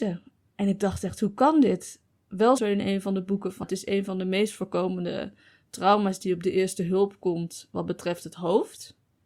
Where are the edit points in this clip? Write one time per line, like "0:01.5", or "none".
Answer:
0:02.6
0:03.6